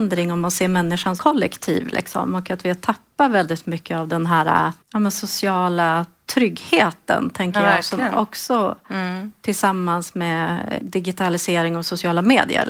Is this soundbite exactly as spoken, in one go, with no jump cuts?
no; 3 cuts; at 1.2 s, 4.8 s, 10.8 s

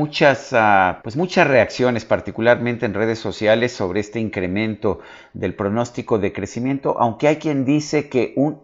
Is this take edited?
yes; 1 cut; at 1.0 s

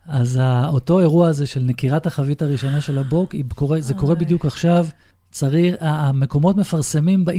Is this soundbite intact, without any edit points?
yes; 0 cuts

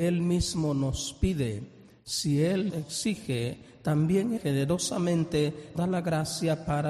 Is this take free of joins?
no; 3 cuts; at 2.7 s, 4.4 s, 5.7 s

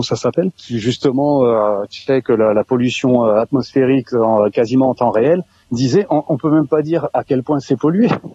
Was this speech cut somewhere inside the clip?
no; 0 cuts

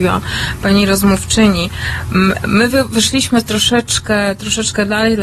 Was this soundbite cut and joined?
no; 0 cuts

